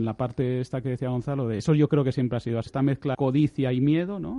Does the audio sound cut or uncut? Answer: cut